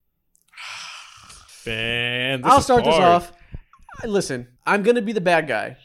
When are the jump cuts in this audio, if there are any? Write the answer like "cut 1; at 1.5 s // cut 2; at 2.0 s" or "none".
cut 1; at 1.5 s // cut 2; at 4.6 s

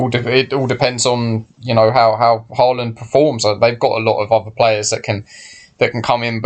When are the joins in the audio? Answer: none

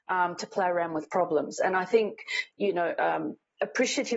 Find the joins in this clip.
none

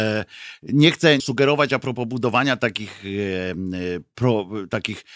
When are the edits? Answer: cut 1; at 1.2 s

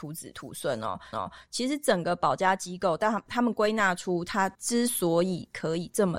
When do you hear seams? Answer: cut 1; at 1.1 s // cut 2; at 4.5 s

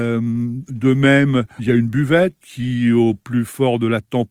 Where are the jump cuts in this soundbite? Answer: cut 1; at 1.6 s // cut 2; at 2.4 s

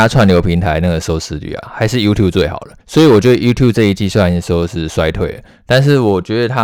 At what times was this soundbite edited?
cut 1; at 2.8 s

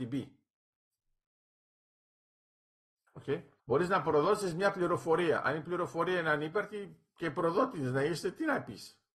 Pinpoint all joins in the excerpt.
cut 1; at 3.6 s

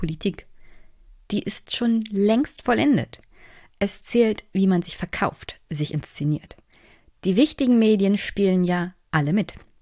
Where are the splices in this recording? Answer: none

